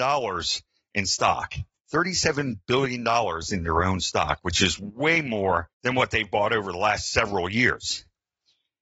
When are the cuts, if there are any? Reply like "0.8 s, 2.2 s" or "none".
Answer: 1.7 s, 5.7 s